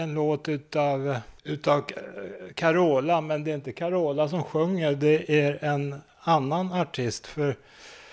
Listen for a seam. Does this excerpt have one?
yes; 1 cut; at 1.4 s

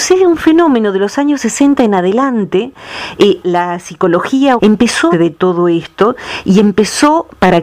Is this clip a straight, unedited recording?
no; 3 cuts; at 3.4 s, 4.6 s, 5.1 s

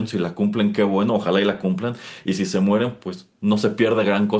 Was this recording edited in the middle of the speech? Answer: no; 0 cuts

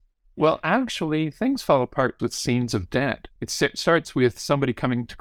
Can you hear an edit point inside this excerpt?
yes; 1 cut; at 2.2 s

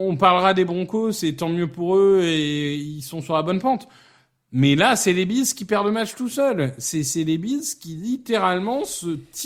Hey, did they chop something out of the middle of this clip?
no; 0 cuts

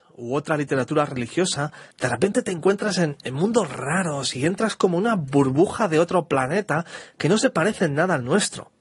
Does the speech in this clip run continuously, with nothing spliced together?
no; 1 cut; at 1.9 s

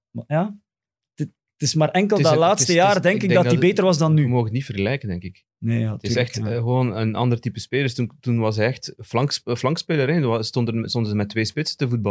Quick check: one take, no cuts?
yes; 0 cuts

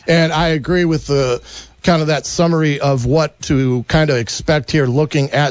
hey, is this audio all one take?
yes; 0 cuts

